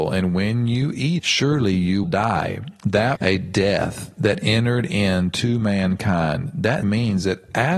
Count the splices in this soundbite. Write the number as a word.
four